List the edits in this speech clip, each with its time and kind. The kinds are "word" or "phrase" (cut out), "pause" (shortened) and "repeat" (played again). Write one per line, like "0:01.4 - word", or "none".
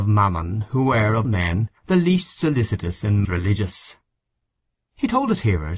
0:01.2 - word
0:01.8 - pause
0:03.2 - word